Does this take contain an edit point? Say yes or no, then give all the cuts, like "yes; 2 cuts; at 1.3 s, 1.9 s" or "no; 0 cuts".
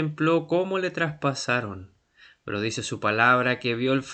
no; 0 cuts